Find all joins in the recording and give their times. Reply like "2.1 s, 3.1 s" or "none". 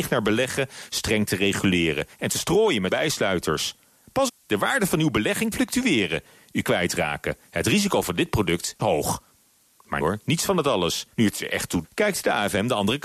2.9 s, 4.3 s, 5.5 s, 6.6 s, 8.8 s, 10.0 s, 11.1 s, 11.8 s